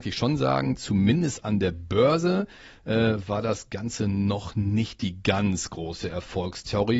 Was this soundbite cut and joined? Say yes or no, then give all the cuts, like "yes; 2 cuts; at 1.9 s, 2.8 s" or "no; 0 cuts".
no; 0 cuts